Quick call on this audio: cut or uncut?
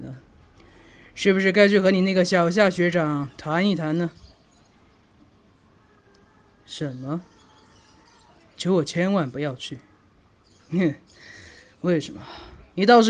uncut